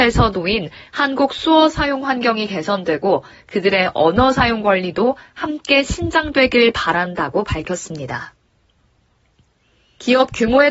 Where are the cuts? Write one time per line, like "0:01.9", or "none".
none